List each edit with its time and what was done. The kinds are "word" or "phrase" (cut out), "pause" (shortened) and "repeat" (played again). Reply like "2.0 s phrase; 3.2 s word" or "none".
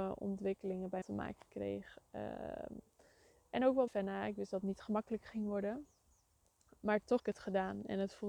1.0 s word; 3.9 s word; 7.2 s word